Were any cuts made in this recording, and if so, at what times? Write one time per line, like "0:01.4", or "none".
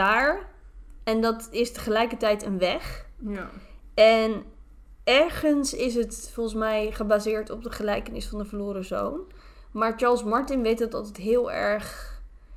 none